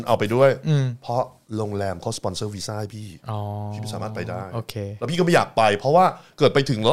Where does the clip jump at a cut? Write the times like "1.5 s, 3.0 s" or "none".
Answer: 3.2 s